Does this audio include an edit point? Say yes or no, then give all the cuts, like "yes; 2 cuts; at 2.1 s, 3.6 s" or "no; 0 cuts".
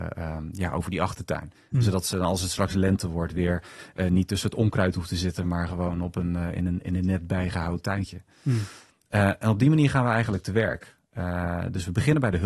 no; 0 cuts